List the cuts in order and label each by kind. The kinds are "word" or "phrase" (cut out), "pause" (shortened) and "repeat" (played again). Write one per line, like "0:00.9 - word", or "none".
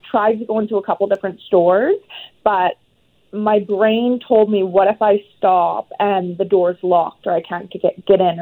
none